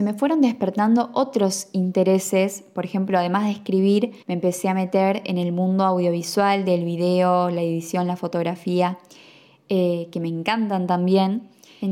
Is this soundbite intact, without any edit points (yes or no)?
no